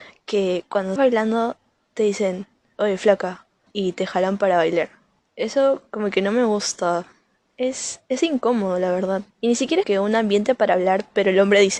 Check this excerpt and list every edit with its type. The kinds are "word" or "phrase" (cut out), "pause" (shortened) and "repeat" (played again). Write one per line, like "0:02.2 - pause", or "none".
0:01.0 - word
0:03.7 - pause
0:05.2 - pause
0:09.3 - pause
0:09.8 - phrase